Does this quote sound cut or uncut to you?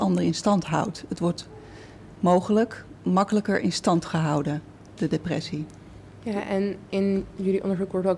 cut